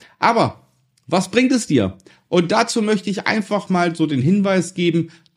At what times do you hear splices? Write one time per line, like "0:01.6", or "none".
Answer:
none